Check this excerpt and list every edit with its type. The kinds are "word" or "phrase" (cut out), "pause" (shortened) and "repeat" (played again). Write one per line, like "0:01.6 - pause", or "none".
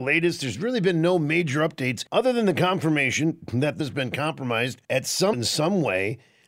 0:02.1 - pause
0:03.8 - word
0:04.8 - pause
0:05.3 - word